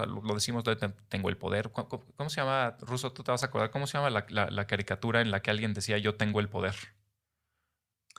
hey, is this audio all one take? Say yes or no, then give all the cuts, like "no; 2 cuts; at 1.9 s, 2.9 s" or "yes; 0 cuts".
yes; 0 cuts